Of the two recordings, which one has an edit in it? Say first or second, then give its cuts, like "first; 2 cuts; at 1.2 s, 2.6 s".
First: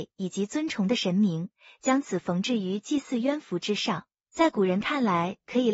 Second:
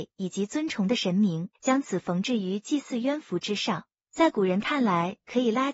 second; 1 cut; at 1.6 s